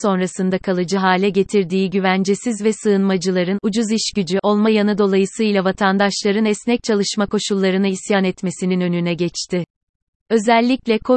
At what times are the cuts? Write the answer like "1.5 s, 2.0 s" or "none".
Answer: none